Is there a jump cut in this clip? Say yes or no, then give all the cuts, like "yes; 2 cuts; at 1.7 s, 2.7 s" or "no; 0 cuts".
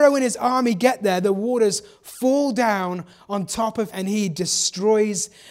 yes; 1 cut; at 3.9 s